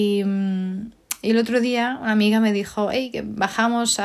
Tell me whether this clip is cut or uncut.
uncut